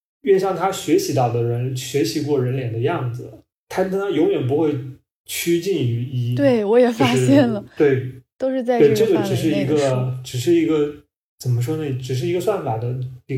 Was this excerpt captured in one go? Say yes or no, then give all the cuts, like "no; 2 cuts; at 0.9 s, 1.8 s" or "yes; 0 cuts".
yes; 0 cuts